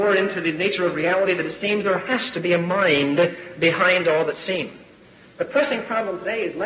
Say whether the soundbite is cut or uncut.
uncut